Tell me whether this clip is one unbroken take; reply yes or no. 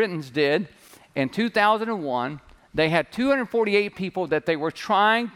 yes